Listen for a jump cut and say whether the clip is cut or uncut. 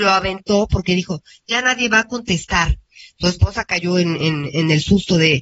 uncut